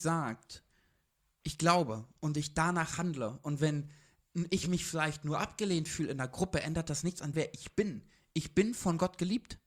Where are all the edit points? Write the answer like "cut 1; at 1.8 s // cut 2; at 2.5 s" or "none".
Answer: cut 1; at 7.3 s